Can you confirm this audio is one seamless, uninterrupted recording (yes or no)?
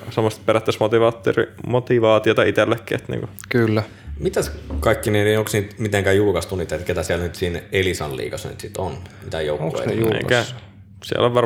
yes